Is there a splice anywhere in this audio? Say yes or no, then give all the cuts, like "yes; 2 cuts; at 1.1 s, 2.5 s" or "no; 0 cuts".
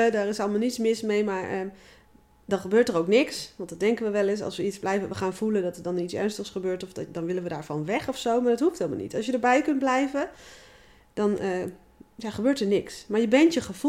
no; 0 cuts